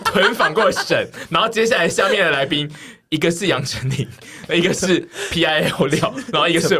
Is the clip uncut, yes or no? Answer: yes